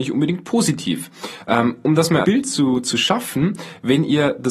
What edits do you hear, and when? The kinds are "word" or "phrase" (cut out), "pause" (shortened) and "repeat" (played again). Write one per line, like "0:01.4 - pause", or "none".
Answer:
0:02.2 - word